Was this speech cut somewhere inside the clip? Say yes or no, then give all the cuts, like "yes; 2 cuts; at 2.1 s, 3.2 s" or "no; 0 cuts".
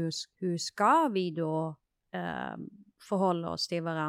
no; 0 cuts